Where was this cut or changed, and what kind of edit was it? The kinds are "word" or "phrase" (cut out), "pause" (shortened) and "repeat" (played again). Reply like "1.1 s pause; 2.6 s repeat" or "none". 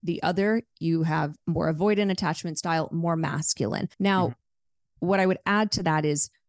3.9 s pause

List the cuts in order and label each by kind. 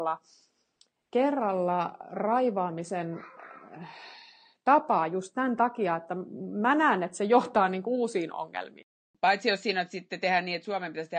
none

